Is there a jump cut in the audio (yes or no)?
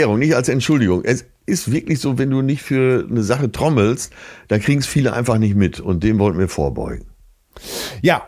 no